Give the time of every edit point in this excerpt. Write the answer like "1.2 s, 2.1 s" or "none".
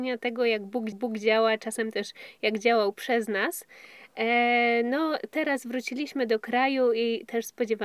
0.9 s